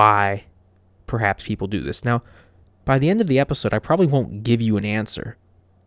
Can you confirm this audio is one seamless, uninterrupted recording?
yes; 0 cuts

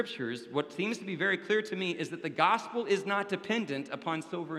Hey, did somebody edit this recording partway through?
no; 0 cuts

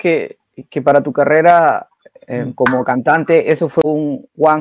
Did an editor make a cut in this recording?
no; 0 cuts

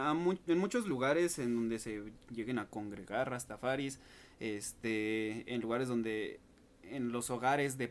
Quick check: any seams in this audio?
no; 0 cuts

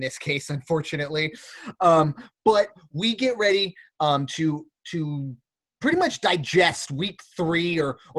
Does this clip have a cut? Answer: no; 0 cuts

